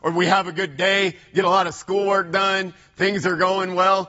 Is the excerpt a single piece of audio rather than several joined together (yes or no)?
yes